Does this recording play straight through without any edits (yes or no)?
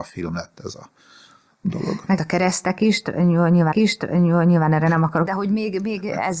no